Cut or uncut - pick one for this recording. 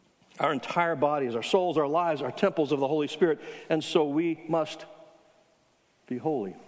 uncut